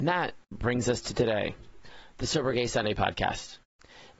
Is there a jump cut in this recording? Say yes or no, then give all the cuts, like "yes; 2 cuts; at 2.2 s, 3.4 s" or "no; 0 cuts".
no; 0 cuts